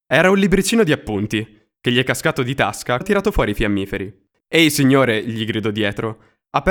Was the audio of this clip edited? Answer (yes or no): yes